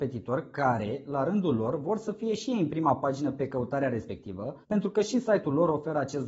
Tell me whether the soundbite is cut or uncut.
cut